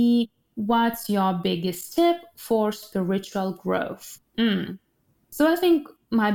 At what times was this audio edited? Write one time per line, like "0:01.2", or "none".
0:04.3